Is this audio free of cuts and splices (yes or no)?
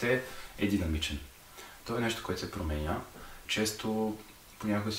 no